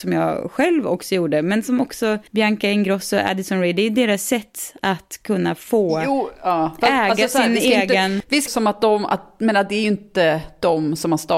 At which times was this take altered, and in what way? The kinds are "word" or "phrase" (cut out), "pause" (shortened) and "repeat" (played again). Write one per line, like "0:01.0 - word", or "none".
0:02.3 - pause
0:08.5 - phrase